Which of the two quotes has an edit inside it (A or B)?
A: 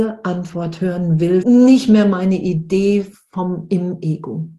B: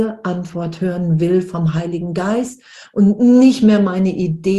A